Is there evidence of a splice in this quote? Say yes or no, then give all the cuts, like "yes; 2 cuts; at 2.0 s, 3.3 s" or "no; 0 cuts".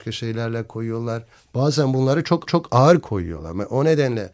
yes; 2 cuts; at 1.3 s, 2.5 s